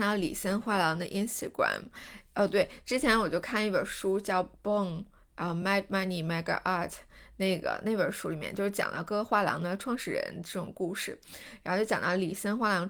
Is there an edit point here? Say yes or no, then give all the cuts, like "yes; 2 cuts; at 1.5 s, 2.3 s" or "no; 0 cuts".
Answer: no; 0 cuts